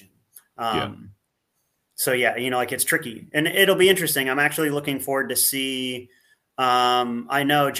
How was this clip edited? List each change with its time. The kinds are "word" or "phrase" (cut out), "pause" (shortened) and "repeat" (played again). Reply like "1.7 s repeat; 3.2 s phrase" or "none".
none